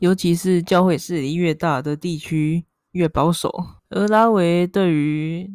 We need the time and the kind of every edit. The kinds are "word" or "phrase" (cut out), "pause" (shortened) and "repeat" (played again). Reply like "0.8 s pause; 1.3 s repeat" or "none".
3.8 s pause